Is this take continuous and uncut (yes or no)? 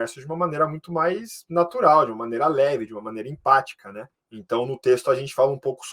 no